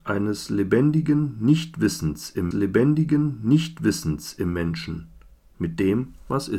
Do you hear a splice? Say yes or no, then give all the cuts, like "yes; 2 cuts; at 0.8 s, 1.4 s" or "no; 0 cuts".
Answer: yes; 1 cut; at 2.5 s